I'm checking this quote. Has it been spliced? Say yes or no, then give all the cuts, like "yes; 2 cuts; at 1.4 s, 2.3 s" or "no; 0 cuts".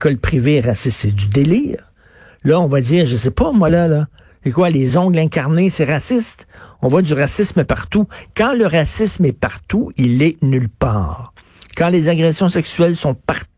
no; 0 cuts